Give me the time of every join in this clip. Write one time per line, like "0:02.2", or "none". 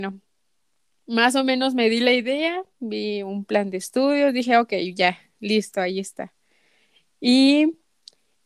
none